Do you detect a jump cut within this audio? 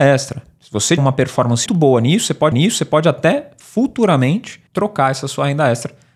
yes; 4 cuts; at 1.0 s, 1.7 s, 2.5 s, 4.7 s

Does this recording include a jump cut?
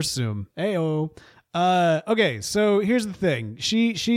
no; 0 cuts

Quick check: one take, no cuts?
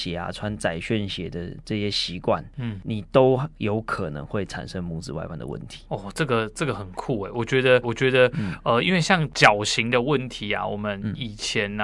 no; 1 cut; at 7.8 s

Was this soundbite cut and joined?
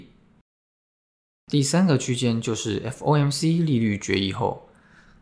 no; 0 cuts

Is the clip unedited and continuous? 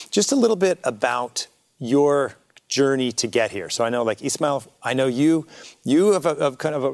yes; 0 cuts

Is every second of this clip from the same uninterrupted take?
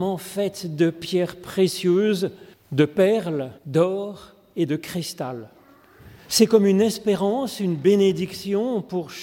no; 3 cuts; at 2.5 s, 3.6 s, 6.2 s

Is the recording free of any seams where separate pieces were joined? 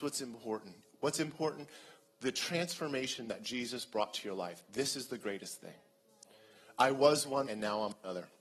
no; 1 cut; at 7.5 s

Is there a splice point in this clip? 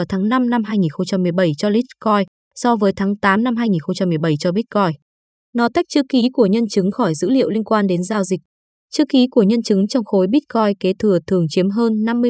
no; 0 cuts

